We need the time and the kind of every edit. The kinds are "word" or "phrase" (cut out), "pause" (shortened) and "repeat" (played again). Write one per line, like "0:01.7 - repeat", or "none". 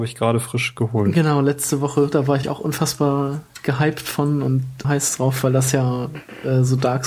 0:02.4 - word
0:04.8 - word